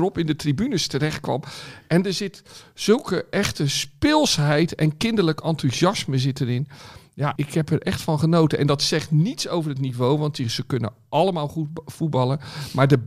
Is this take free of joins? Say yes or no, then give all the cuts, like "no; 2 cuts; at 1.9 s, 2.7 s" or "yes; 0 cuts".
no; 1 cut; at 7.4 s